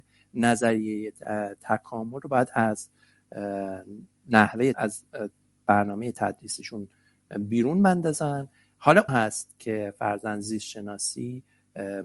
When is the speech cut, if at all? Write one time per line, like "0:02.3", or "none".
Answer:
0:04.7
0:09.1